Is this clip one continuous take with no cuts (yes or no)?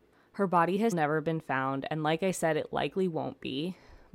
no